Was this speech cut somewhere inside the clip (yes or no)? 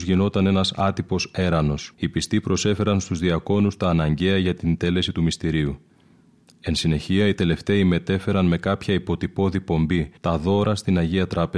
yes